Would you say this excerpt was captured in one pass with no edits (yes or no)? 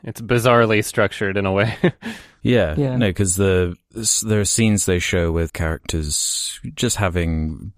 no